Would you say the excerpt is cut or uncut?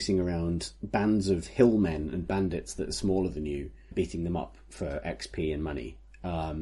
cut